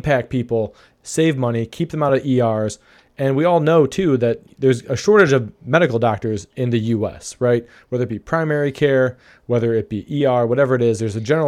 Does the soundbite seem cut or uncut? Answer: uncut